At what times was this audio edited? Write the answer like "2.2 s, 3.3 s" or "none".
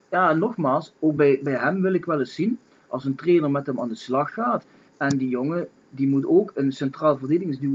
none